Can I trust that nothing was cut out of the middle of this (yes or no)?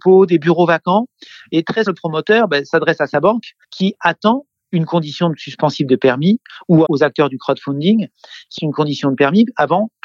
no